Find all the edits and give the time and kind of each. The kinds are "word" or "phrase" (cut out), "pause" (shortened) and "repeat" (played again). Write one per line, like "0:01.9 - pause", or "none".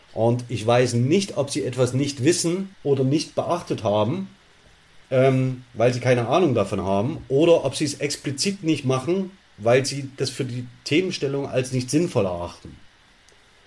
0:02.7 - pause
0:05.0 - pause